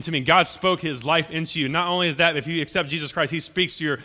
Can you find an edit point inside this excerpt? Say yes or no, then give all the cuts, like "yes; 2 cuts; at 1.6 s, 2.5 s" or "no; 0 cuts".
no; 0 cuts